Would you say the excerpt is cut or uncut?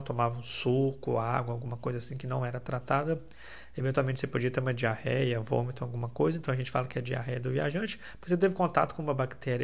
uncut